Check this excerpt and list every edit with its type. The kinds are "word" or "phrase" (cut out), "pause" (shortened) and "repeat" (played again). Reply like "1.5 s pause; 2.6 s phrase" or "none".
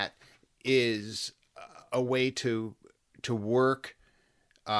none